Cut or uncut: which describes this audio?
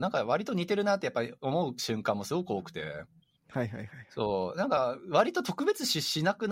uncut